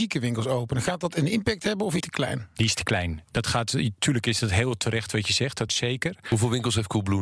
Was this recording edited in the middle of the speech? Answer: yes; 2 cuts; at 2.0 s, 5.7 s

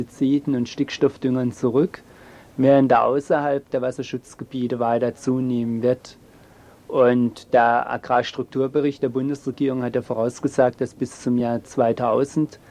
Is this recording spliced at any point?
no; 0 cuts

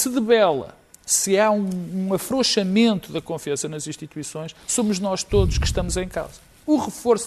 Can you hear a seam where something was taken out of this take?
yes; 1 cut; at 4.6 s

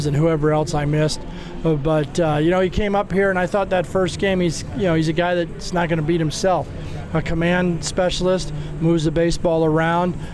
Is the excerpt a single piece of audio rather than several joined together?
yes; 0 cuts

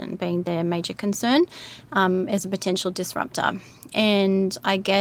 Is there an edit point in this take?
no; 0 cuts

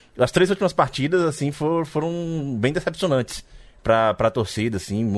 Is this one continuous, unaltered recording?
yes; 0 cuts

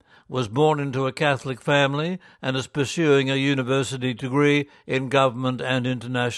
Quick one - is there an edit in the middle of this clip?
no; 0 cuts

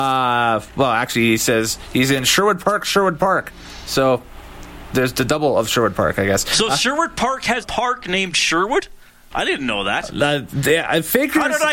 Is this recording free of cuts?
no; 1 cut; at 7.6 s

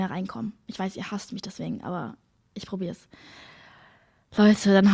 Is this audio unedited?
yes; 0 cuts

